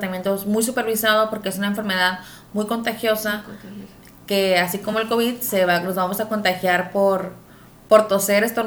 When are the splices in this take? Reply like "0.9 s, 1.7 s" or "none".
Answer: none